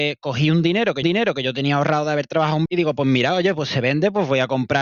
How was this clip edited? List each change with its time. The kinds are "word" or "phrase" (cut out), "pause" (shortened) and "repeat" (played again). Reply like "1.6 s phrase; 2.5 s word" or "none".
1.0 s repeat; 2.7 s word